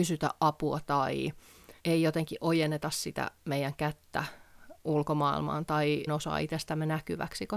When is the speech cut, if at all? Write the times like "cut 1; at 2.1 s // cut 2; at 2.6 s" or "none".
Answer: cut 1; at 1.8 s // cut 2; at 6.1 s